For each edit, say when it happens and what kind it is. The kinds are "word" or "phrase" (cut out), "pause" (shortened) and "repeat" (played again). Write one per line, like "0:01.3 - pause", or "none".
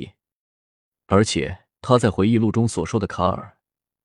0:01.7 - pause